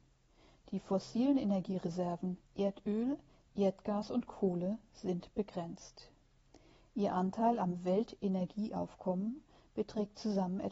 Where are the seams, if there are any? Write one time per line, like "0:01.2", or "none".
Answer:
none